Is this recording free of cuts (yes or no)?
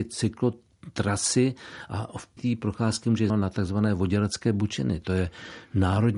no